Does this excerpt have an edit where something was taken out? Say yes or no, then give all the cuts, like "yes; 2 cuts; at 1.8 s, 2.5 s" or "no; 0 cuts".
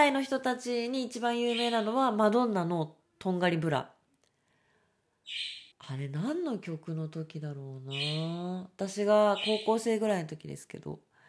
yes; 1 cut; at 5.7 s